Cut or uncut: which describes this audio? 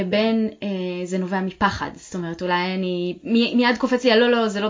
uncut